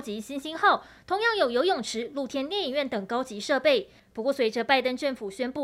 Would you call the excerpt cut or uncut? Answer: uncut